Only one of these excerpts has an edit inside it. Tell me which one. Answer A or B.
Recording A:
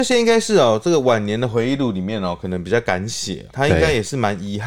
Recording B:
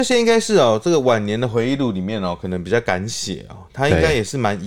A